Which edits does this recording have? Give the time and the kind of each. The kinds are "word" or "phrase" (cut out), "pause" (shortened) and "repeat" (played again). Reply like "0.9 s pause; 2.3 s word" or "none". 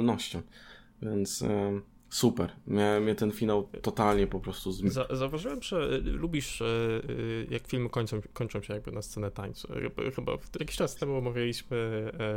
1.9 s pause; 10.6 s word